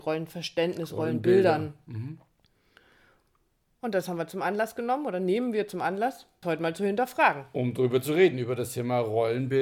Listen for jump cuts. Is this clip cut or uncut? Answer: cut